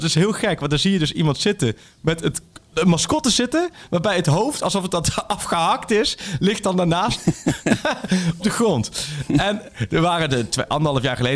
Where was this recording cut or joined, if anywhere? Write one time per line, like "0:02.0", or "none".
0:02.7
0:08.4